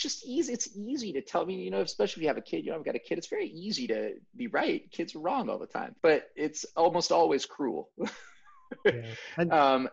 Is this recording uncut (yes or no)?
no